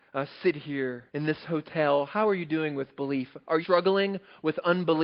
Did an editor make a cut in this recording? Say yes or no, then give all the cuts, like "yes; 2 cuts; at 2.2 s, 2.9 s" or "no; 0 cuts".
yes; 2 cuts; at 1.1 s, 3.6 s